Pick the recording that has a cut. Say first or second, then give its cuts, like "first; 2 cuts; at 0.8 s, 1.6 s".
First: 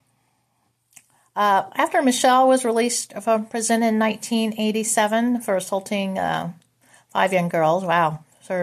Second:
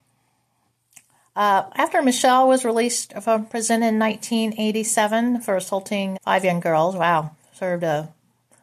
second; 1 cut; at 6.1 s